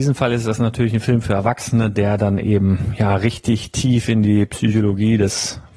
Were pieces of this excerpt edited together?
no; 0 cuts

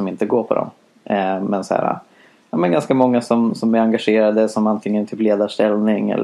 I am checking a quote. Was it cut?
no; 0 cuts

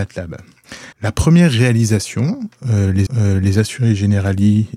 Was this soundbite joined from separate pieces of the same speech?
yes; 2 cuts; at 0.9 s, 3.1 s

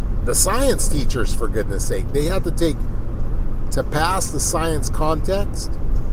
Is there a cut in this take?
yes; 1 cut; at 3.7 s

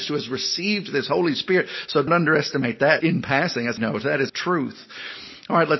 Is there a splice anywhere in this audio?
yes; 4 cuts; at 2.1 s, 3.0 s, 3.8 s, 4.3 s

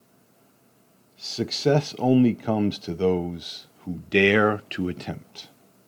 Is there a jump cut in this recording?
no; 0 cuts

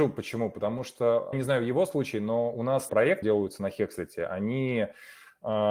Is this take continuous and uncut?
no; 3 cuts; at 1.3 s, 2.9 s, 3.2 s

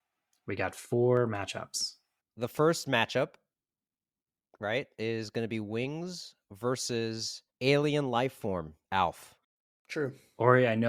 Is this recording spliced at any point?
yes; 2 cuts; at 7.5 s, 8.8 s

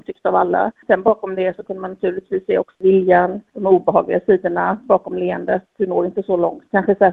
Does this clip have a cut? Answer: yes; 1 cut; at 2.7 s

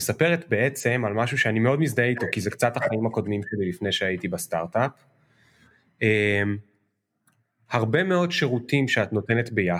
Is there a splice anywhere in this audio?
no; 0 cuts

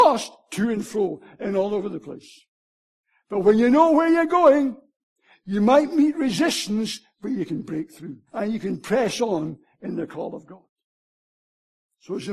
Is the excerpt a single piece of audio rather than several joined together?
no; 1 cut; at 8.3 s

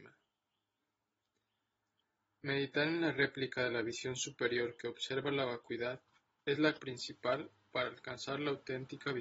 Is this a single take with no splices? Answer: no; 1 cut; at 6.8 s

